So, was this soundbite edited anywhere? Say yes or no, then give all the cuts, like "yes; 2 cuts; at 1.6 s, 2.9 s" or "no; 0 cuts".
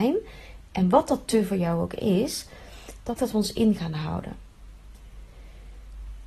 yes; 1 cut; at 3.2 s